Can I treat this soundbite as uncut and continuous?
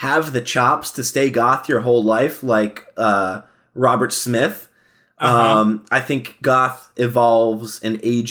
yes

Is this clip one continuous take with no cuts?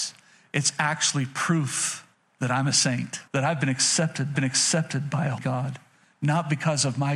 no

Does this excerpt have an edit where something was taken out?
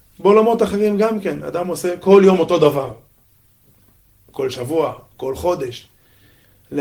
no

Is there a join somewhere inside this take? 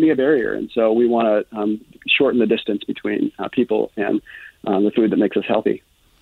no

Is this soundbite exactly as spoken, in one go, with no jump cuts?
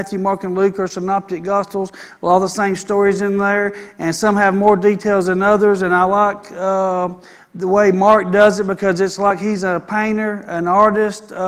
yes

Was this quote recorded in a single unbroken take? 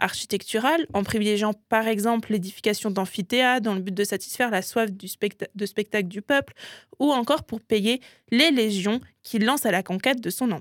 yes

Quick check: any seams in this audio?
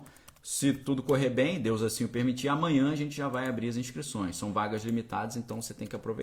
no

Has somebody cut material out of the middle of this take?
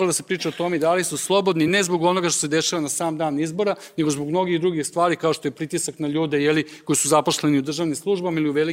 no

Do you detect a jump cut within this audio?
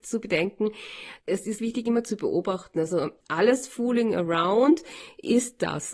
yes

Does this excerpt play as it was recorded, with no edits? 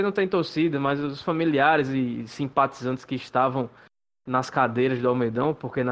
yes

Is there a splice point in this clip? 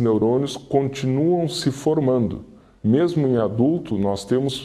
no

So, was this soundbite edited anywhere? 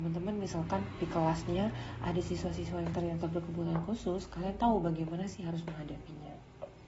no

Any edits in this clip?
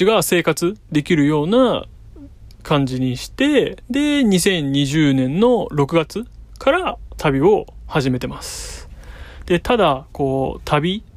yes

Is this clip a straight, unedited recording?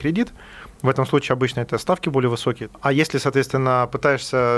yes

